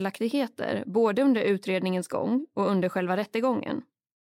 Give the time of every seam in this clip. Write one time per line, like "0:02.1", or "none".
none